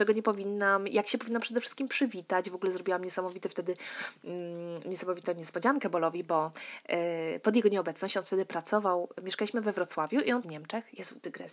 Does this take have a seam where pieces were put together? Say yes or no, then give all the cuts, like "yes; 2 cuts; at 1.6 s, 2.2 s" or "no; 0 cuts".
yes; 1 cut; at 10.4 s